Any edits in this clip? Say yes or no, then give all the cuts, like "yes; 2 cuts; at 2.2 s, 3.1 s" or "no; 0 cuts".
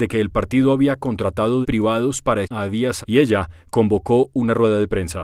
yes; 3 cuts; at 1.6 s, 2.4 s, 3.0 s